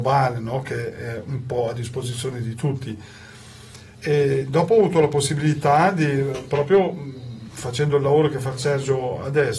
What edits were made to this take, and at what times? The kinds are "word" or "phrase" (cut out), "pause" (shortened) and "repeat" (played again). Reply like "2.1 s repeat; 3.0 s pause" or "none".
3.9 s pause

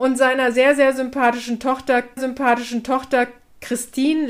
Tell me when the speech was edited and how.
2.2 s repeat

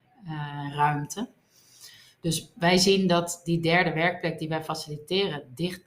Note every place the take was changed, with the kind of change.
none

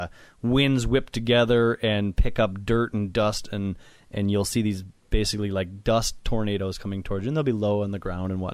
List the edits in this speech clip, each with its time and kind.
none

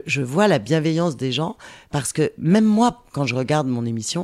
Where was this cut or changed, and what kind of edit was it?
none

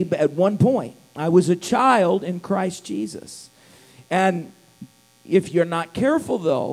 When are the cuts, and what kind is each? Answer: none

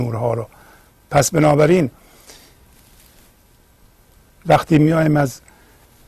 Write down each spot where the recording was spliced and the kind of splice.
none

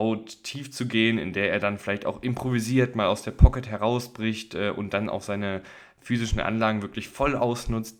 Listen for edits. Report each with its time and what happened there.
none

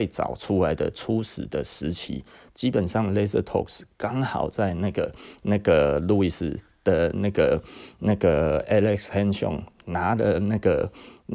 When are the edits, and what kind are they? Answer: none

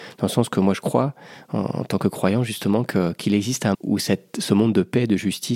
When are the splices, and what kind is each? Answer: 3.7 s word

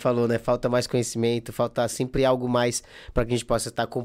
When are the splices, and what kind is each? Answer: none

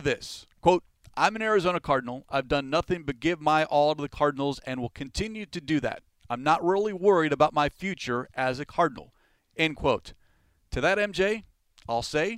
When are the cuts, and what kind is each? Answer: none

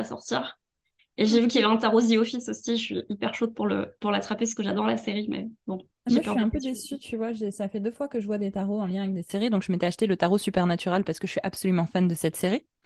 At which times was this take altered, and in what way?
5.6 s pause

